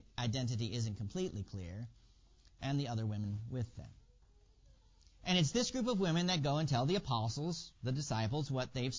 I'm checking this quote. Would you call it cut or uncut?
uncut